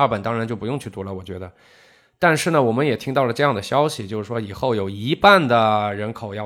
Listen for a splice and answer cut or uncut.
uncut